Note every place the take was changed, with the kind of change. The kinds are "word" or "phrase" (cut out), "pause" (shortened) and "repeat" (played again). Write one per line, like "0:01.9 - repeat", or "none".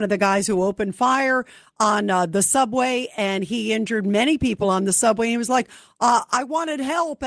none

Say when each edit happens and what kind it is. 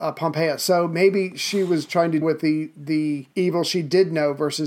0:02.2 - word
0:03.3 - pause

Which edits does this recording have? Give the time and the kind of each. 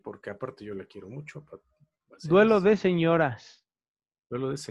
none

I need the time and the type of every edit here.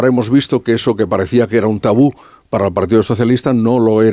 none

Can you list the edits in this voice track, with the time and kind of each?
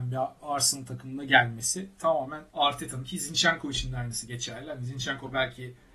0:02.5 - pause

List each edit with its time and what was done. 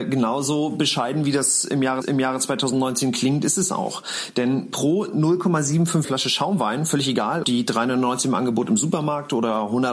0:02.0 - repeat
0:06.0 - word
0:07.4 - word

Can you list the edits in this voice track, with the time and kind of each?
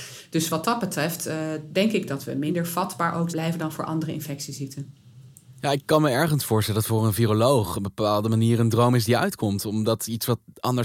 0:03.3 - word

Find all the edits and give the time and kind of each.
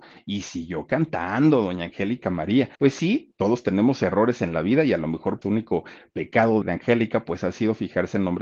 0:02.8 - pause
0:05.4 - word
0:06.6 - word

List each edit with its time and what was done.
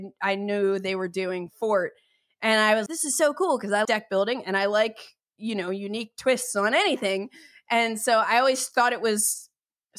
0:02.9 - word
0:03.8 - word

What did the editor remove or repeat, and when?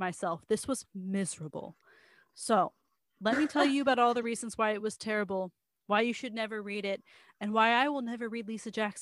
none

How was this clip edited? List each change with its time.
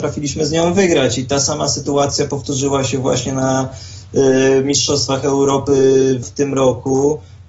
0:06.2 - phrase

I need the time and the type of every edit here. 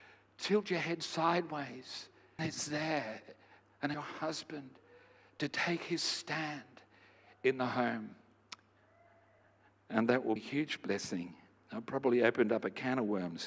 0:02.4 - word
0:03.9 - word
0:10.4 - word

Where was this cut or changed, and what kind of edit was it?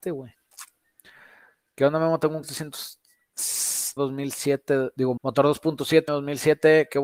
0:02.4 - word
0:04.0 - word
0:05.2 - word
0:06.1 - word

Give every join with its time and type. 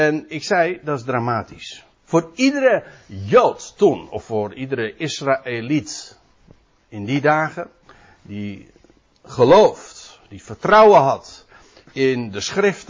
0:01.9 - pause
0:07.8 - pause

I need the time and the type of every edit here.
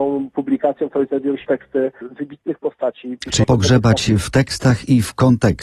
0:01.4 - word
0:02.0 - word
0:03.4 - word

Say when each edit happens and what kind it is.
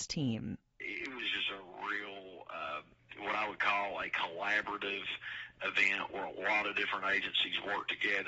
none

